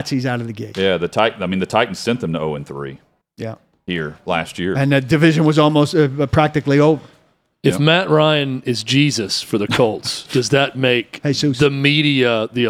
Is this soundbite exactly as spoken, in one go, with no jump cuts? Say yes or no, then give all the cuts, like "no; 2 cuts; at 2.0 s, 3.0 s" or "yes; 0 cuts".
no; 1 cut; at 3.2 s